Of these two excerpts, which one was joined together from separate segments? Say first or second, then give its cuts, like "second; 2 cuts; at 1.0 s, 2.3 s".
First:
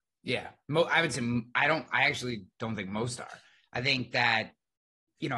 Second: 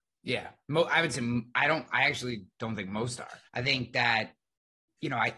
second; 1 cut; at 3.5 s